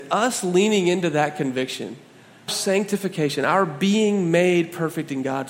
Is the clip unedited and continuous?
no; 1 cut; at 2.5 s

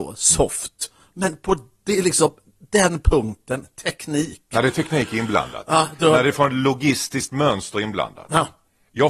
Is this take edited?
no; 0 cuts

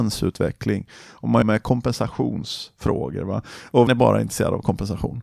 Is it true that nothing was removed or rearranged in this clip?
no; 2 cuts; at 1.4 s, 3.9 s

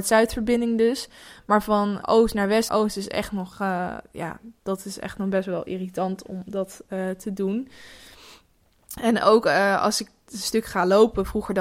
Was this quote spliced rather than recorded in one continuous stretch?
yes; 2 cuts; at 2.0 s, 2.7 s

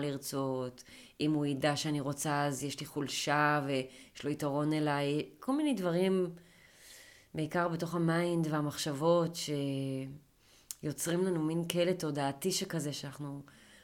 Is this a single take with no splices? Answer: yes; 0 cuts

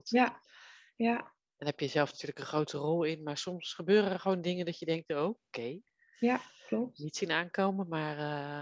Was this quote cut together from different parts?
no; 0 cuts

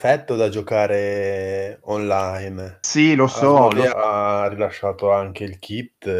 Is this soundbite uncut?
no; 1 cut; at 3.9 s

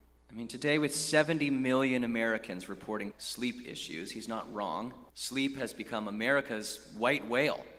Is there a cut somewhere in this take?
yes; 2 cuts; at 3.1 s, 5.1 s

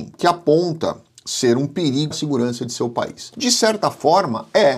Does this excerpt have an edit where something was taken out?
yes; 1 cut; at 2.1 s

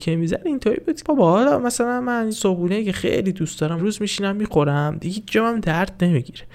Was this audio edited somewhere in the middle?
yes; 3 cuts; at 1.0 s, 2.3 s, 3.8 s

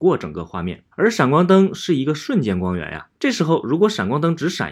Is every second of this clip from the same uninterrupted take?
no; 2 cuts; at 0.9 s, 3.2 s

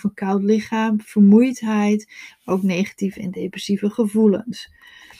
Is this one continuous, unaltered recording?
yes; 0 cuts

